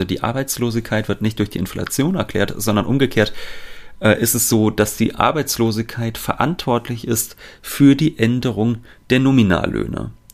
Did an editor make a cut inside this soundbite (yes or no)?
no